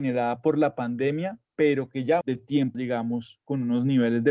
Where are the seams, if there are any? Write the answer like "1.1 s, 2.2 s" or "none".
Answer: 1.4 s, 2.2 s, 2.7 s